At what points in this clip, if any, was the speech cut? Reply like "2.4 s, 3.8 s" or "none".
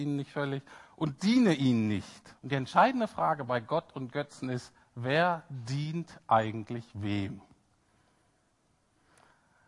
2.4 s